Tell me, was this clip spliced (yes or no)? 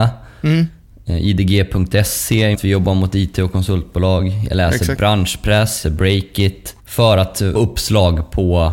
yes